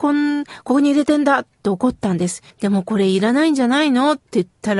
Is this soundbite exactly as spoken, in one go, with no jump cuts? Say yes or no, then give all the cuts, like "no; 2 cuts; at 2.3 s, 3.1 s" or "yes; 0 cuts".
no; 1 cut; at 2.5 s